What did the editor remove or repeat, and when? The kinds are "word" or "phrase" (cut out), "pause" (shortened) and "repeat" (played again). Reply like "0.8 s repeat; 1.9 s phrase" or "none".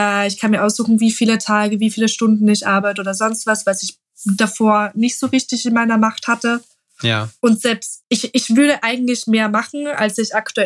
8.0 s pause